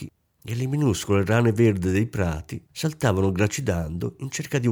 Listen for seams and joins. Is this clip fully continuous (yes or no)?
no